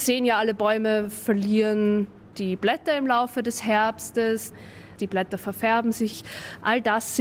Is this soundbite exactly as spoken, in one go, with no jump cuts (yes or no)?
yes